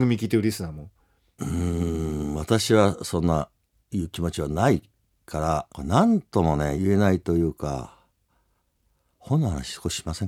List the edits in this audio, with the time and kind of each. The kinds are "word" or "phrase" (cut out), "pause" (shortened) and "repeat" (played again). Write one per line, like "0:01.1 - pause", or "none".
none

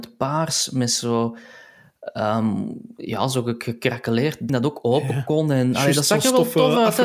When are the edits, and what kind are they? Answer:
0:04.5 - word

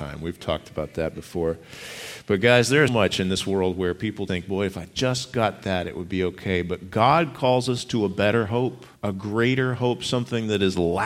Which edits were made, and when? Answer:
0:02.9 - word
0:04.3 - word
0:09.0 - pause

